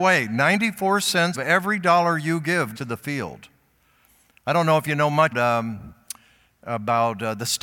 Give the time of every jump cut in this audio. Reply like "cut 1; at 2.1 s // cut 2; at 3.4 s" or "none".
cut 1; at 1.3 s // cut 2; at 2.8 s // cut 3; at 5.3 s